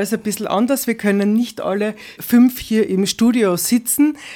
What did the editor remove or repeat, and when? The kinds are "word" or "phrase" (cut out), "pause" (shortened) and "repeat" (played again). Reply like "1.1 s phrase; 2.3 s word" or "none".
2.2 s word